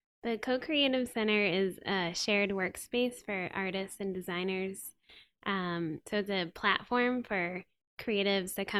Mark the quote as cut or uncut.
uncut